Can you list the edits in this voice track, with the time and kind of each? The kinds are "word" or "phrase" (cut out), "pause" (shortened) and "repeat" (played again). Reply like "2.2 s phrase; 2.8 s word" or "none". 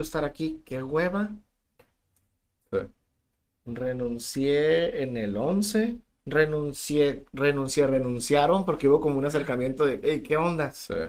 none

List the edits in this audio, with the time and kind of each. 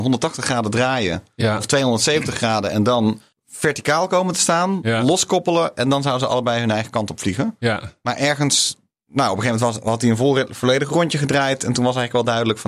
3.3 s pause

